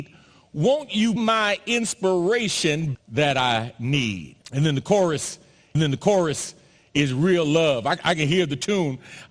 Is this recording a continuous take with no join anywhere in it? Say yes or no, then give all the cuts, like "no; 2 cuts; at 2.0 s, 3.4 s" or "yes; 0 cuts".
no; 4 cuts; at 1.2 s, 2.9 s, 4.4 s, 5.7 s